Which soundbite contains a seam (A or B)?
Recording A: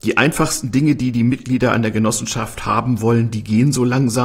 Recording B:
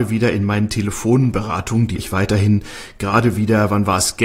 B